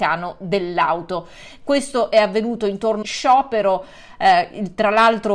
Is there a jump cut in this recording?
yes; 1 cut; at 3.0 s

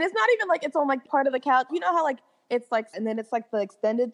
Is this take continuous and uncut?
no; 3 cuts; at 1.1 s, 1.7 s, 2.9 s

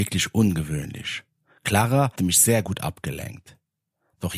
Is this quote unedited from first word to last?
no; 1 cut; at 2.2 s

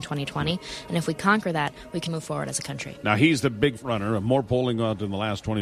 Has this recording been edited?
yes; 2 cuts; at 2.1 s, 3.8 s

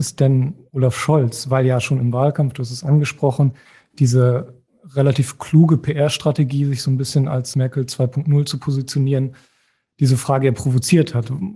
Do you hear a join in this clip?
no; 0 cuts

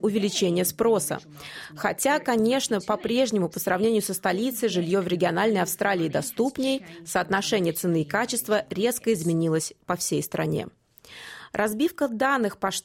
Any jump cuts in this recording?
no; 0 cuts

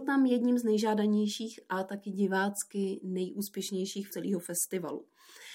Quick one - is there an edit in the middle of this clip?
yes; 1 cut; at 4.1 s

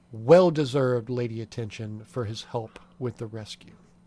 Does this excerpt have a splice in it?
no; 0 cuts

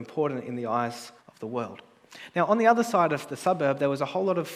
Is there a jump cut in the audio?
yes; 1 cut; at 1.2 s

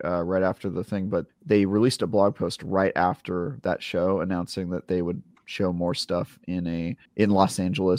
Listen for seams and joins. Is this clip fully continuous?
no; 2 cuts; at 1.3 s, 7.1 s

